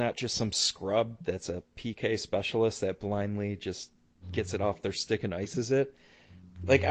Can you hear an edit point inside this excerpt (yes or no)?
no